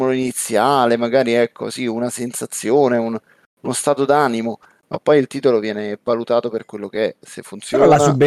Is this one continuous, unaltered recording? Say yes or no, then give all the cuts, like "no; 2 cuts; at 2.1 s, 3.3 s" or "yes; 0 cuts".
yes; 0 cuts